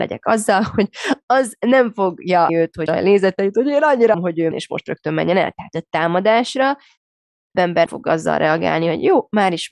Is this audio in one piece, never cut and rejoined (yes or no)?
no